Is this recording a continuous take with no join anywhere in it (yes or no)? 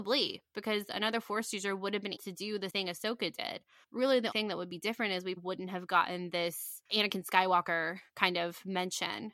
no